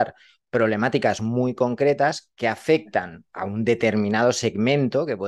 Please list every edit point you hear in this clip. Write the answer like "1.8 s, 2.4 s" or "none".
none